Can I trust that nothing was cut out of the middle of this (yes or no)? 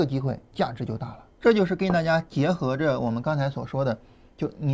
no